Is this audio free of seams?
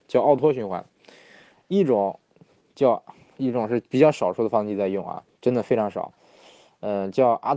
yes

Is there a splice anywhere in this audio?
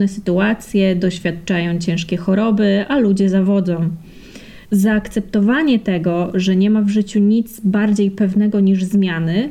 yes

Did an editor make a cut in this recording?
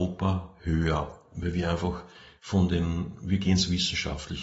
no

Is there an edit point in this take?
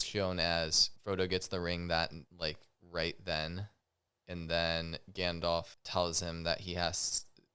yes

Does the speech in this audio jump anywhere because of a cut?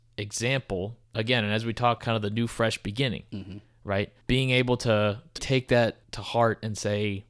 yes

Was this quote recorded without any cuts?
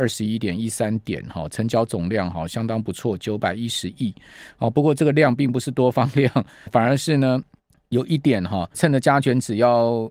no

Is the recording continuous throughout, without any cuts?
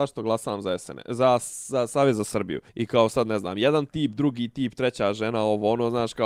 no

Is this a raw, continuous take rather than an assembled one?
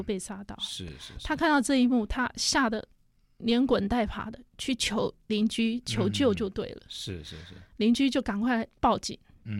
yes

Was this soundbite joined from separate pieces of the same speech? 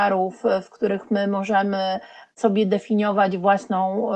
no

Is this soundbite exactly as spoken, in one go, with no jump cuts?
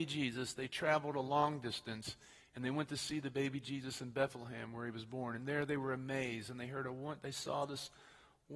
yes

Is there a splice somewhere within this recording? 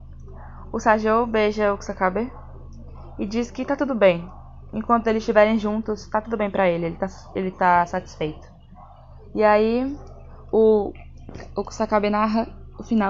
no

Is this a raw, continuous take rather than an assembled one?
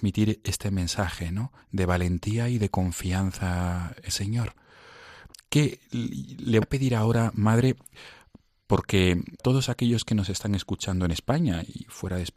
no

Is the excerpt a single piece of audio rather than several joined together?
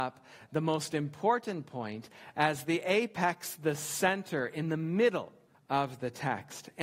yes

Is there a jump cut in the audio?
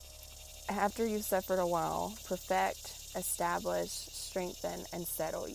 no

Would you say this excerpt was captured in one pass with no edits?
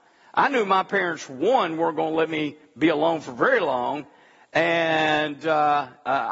yes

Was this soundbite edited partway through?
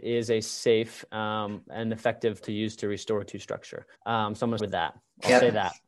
yes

